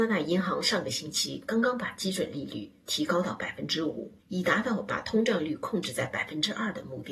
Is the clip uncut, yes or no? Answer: no